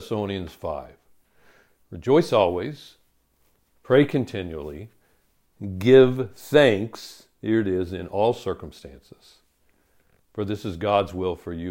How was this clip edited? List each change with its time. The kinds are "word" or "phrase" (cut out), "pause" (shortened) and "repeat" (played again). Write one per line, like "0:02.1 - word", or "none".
none